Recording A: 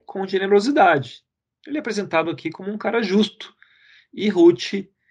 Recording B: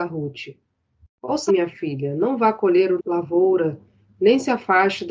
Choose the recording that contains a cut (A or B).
B